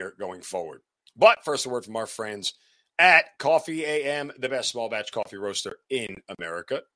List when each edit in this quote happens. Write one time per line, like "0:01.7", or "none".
none